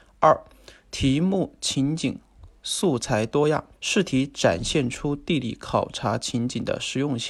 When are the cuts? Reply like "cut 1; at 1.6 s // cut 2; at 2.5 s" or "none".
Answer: cut 1; at 3.7 s